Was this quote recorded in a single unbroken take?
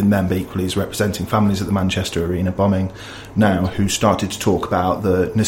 yes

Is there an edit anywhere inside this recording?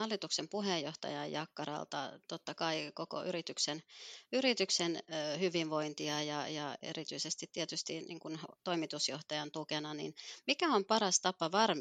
no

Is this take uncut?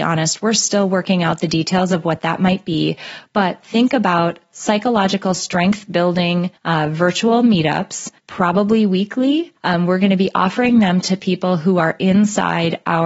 no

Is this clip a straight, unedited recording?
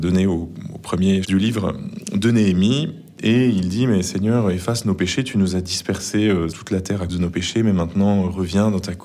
no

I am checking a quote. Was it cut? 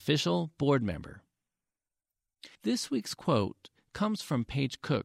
yes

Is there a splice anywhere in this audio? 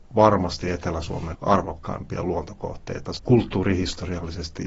yes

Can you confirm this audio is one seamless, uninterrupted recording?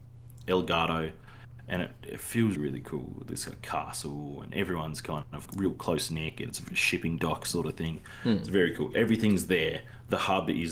no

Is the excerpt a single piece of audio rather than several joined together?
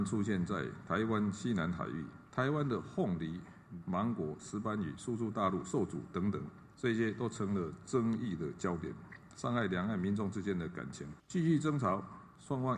no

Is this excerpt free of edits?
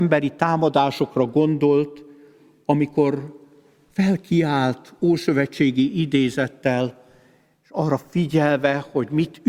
yes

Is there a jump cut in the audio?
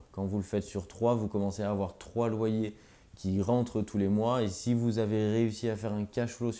no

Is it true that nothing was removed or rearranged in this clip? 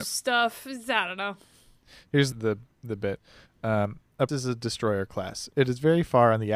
no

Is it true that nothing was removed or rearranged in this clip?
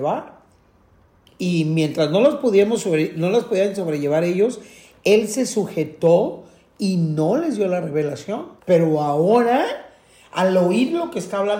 no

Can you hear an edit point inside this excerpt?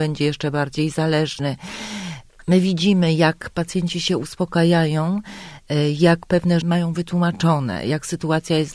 yes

